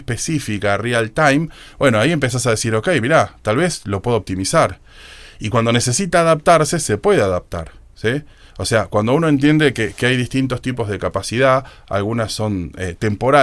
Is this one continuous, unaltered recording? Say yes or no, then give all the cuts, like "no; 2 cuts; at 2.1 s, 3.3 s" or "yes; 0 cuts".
yes; 0 cuts